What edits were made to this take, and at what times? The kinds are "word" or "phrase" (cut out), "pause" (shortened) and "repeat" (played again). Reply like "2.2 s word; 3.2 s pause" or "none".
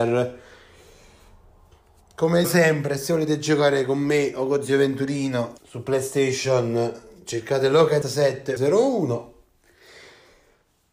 2.4 s word; 5.6 s pause; 8.0 s word; 8.6 s phrase